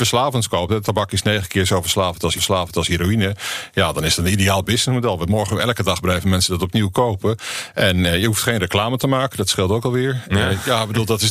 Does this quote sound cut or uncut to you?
cut